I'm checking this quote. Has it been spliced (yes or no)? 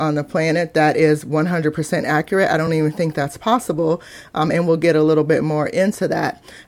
no